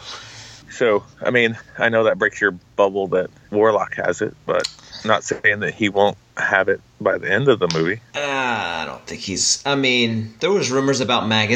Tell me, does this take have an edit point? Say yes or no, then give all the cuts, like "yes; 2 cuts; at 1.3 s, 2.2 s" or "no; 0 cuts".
no; 0 cuts